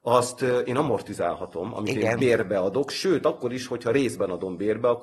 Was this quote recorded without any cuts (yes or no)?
yes